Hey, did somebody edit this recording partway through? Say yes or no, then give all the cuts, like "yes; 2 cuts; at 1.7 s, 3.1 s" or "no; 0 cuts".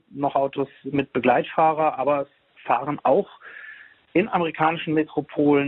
no; 0 cuts